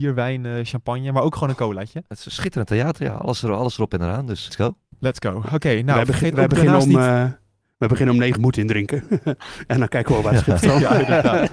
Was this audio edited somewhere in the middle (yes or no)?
yes